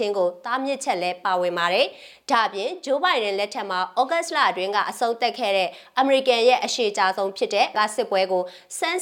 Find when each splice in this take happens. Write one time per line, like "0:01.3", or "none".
0:07.7